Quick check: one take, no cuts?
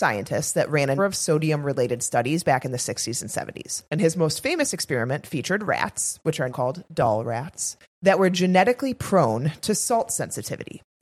no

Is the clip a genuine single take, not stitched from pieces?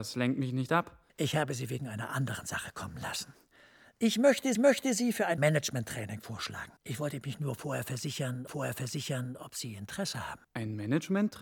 no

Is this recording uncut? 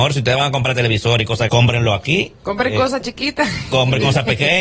no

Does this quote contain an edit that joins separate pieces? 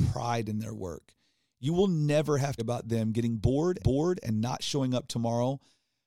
yes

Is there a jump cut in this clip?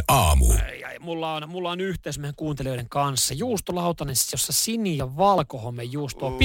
no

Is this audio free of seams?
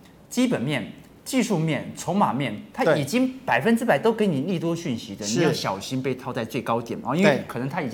yes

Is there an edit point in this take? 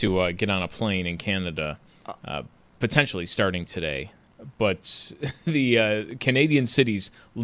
no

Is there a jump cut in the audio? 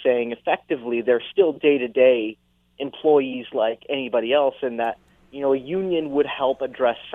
no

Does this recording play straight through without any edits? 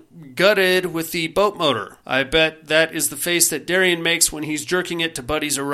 no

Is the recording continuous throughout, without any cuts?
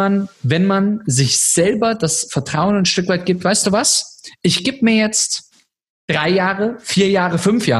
yes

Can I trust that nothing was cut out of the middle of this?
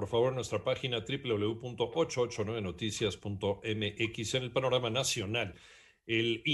yes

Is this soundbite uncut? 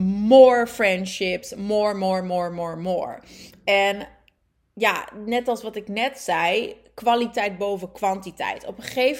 yes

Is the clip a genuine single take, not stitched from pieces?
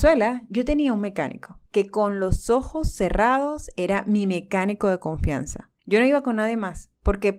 no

